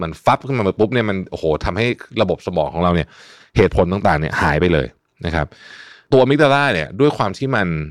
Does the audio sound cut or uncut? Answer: uncut